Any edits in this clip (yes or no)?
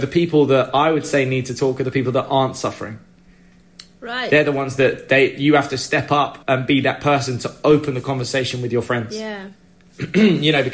yes